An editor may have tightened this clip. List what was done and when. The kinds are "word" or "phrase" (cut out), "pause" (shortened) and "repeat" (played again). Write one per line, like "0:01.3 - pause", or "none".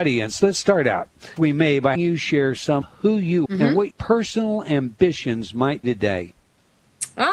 0:01.4 - word
0:02.0 - word
0:02.8 - word
0:03.5 - word
0:03.9 - word
0:05.8 - word